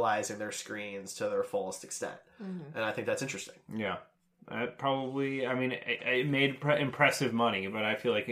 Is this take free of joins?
yes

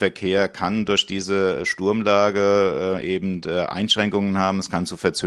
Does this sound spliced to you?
no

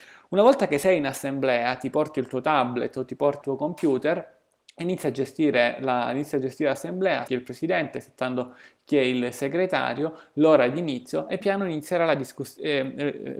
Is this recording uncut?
no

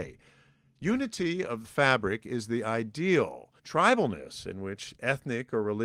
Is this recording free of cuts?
no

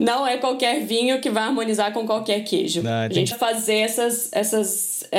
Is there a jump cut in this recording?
yes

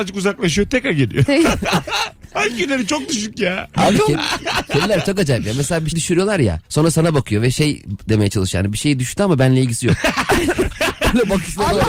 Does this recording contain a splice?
yes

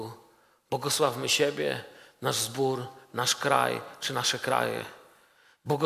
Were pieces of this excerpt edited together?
no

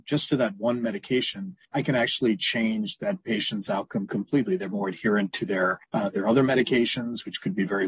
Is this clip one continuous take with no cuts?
no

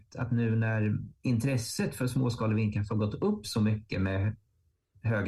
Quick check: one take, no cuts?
yes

